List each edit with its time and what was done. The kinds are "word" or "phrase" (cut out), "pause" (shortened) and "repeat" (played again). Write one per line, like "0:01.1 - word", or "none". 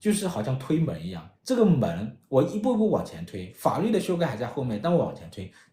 0:01.4 - pause